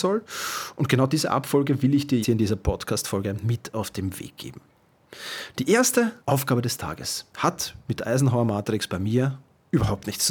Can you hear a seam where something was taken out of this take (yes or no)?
yes